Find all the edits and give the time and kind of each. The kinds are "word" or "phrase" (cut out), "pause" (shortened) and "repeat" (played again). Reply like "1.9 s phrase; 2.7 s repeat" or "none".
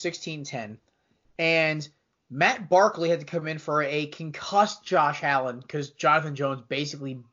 none